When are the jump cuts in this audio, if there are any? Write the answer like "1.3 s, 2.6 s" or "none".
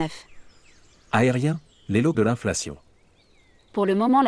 2.1 s

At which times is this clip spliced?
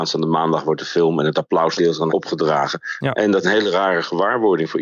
1.8 s, 2.1 s, 3.4 s

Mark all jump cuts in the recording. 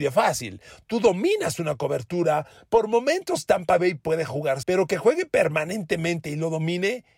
4.6 s

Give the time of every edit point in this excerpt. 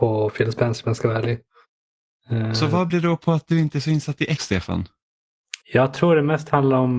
2.9 s, 4.4 s, 5.6 s

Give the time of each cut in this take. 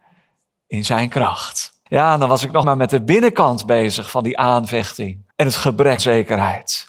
1.9 s, 2.6 s, 5.3 s, 6.0 s

